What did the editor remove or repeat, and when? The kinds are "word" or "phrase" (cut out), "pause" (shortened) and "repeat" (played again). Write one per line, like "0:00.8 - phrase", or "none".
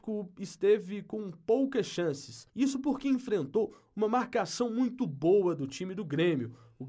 0:02.5 - pause